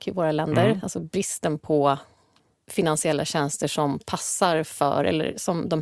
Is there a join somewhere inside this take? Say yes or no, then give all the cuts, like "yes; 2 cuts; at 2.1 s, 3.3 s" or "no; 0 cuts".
no; 0 cuts